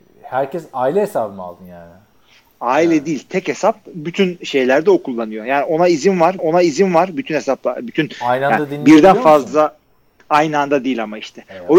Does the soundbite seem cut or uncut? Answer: cut